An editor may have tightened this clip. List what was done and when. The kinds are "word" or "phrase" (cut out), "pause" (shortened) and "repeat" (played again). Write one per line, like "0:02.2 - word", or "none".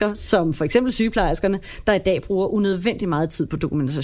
none